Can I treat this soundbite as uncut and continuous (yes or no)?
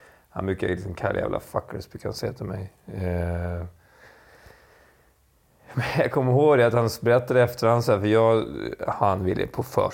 yes